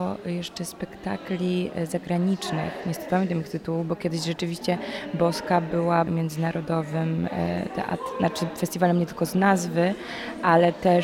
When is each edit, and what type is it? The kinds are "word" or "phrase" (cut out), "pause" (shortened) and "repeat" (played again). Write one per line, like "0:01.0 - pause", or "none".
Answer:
0:03.1 - word
0:06.1 - word